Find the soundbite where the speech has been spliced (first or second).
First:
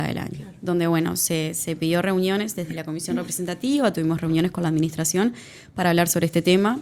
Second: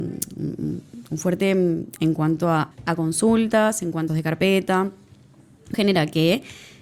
second